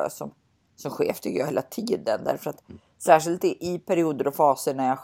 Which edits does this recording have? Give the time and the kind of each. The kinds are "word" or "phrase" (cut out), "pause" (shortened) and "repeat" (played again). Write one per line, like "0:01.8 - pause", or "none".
none